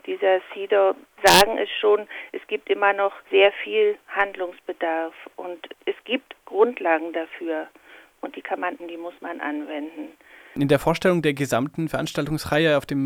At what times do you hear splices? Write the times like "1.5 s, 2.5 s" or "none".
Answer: 3.3 s, 5.7 s, 8.8 s